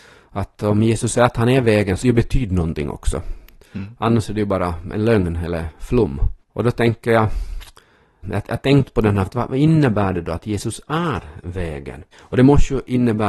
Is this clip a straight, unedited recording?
no; 5 cuts; at 2.0 s, 6.4 s, 8.2 s, 9.3 s, 12.1 s

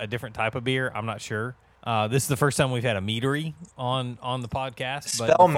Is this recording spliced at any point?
yes; 1 cut; at 1.7 s

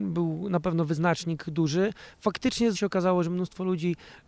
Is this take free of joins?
no; 2 cuts; at 2.1 s, 2.7 s

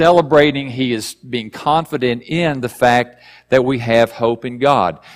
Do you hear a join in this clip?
no; 0 cuts

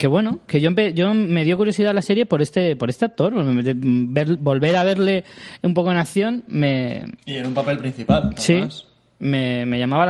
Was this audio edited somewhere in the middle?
no; 0 cuts

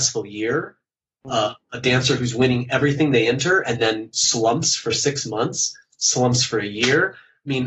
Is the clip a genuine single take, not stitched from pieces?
yes; 0 cuts

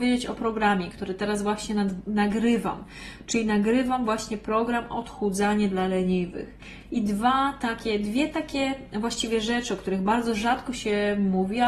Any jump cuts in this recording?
no; 0 cuts

